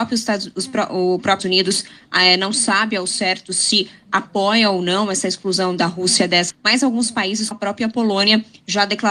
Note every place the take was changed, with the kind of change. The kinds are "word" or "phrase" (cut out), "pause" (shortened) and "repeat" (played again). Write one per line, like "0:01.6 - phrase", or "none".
0:01.4 - word
0:06.5 - word
0:07.5 - word